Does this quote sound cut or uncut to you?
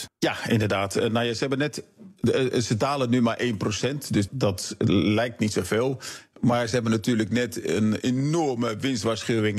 cut